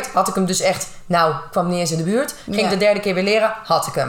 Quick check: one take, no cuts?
yes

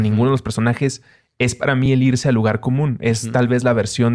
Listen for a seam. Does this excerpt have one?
no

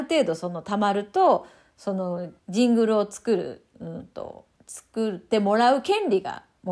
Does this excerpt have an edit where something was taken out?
yes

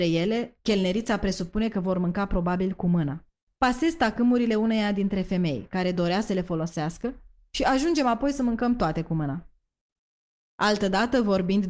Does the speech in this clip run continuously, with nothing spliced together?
yes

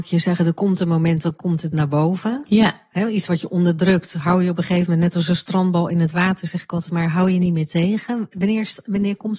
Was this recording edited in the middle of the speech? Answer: no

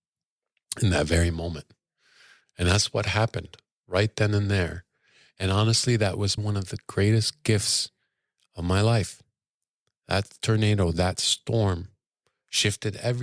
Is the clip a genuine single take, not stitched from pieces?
no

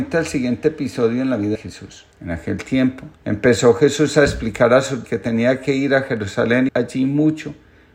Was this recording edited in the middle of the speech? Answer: yes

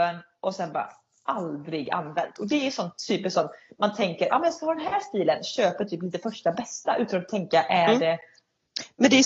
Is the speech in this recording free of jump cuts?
yes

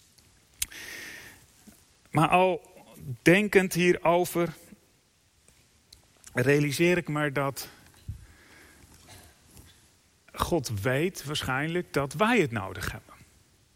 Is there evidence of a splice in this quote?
no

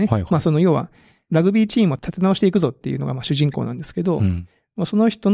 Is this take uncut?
yes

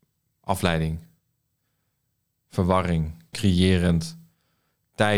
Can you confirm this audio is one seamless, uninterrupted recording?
no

